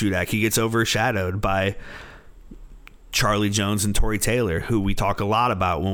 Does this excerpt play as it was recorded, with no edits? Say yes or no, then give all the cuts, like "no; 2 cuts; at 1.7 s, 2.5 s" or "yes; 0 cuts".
yes; 0 cuts